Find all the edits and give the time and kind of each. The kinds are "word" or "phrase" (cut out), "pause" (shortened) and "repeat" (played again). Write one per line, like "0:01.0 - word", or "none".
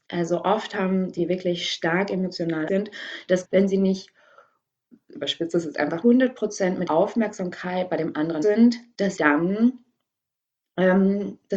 0:01.2 - word
0:02.7 - word
0:03.4 - word
0:05.1 - word
0:06.0 - word
0:06.9 - word
0:08.4 - word
0:09.2 - word